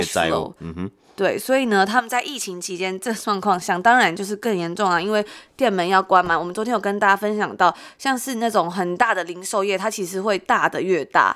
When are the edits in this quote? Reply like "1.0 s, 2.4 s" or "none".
none